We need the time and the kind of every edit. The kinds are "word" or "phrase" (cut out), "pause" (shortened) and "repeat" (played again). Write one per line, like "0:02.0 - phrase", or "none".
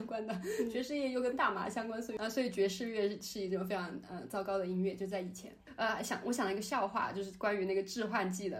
none